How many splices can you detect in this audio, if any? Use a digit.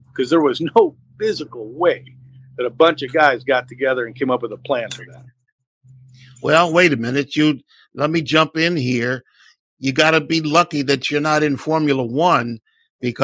0